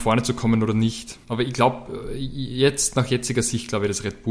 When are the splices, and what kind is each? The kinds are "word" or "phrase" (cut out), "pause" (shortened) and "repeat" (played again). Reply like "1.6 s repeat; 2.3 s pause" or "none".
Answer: 1.2 s pause